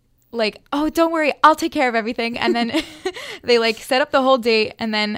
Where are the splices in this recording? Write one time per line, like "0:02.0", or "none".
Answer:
none